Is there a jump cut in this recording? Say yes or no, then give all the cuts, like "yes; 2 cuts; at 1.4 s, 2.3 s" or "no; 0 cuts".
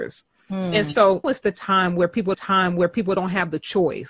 yes; 2 cuts; at 1.2 s, 2.3 s